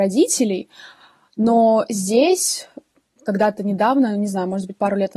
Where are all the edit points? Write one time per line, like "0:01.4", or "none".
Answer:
none